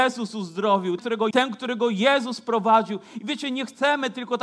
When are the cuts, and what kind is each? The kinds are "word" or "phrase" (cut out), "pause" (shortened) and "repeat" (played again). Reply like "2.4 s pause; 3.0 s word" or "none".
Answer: 1.0 s word; 1.3 s phrase